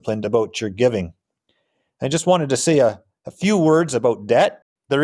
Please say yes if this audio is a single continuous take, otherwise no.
yes